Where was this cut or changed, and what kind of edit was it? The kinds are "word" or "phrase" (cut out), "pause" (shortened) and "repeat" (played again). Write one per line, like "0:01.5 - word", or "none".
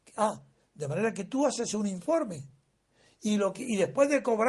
none